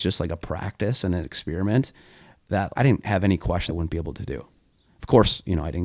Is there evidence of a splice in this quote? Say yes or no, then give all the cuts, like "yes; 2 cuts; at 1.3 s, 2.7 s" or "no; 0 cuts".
yes; 2 cuts; at 2.7 s, 3.7 s